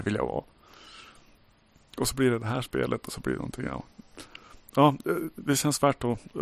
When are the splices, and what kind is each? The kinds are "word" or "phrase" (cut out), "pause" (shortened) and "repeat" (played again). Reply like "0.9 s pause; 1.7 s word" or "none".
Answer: none